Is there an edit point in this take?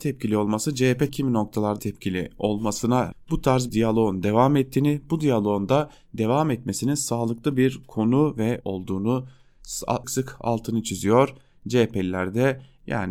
yes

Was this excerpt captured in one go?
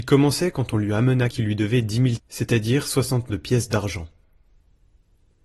no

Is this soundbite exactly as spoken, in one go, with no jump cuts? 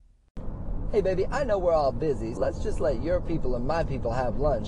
no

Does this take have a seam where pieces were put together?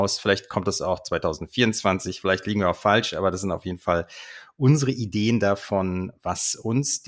no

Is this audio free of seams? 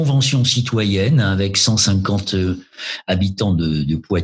yes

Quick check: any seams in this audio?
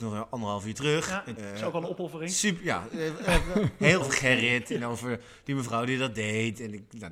yes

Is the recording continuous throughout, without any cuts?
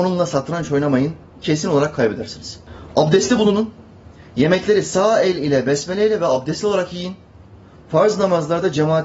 yes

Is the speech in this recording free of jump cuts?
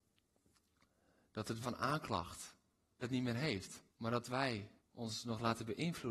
no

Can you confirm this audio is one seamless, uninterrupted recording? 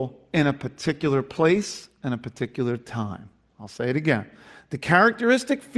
yes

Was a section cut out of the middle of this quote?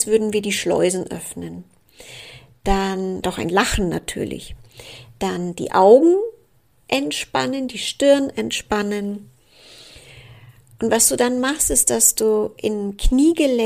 yes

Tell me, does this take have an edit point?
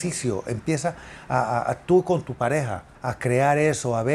yes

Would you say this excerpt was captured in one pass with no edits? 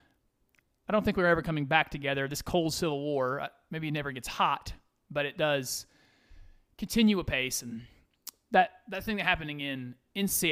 yes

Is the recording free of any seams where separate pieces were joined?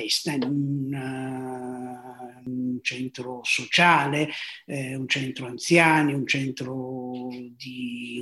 yes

